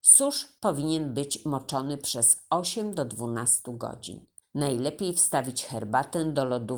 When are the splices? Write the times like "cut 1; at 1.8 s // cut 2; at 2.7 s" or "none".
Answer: cut 1; at 4.4 s